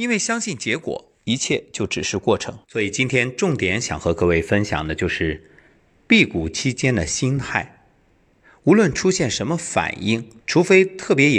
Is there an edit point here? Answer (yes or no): yes